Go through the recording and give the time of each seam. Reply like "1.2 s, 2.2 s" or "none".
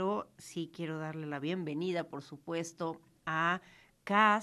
none